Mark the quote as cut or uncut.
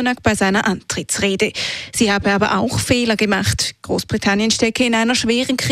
uncut